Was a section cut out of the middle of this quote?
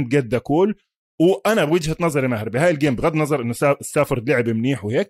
no; 0 cuts

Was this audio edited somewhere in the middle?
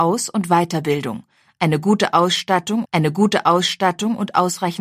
yes; 1 cut; at 2.8 s

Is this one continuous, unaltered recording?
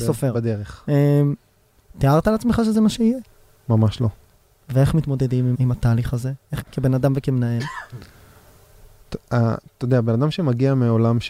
no; 3 cuts; at 3.5 s, 5.5 s, 6.6 s

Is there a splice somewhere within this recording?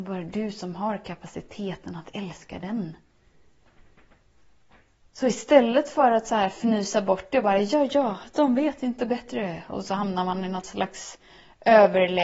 no; 0 cuts

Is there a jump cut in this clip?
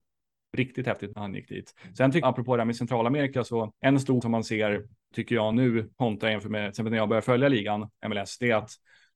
yes; 6 cuts; at 1.1 s, 2.2 s, 3.7 s, 4.2 s, 5.1 s, 5.9 s

